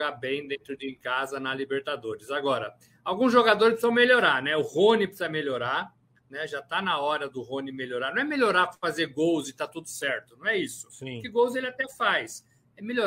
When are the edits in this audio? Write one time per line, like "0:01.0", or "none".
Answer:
none

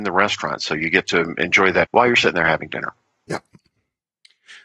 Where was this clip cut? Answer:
0:01.8

